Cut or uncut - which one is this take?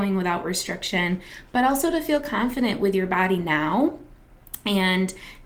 uncut